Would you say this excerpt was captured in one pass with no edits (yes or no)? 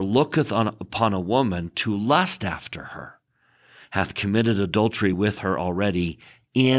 yes